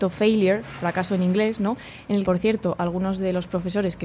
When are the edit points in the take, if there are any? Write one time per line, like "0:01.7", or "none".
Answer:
0:02.2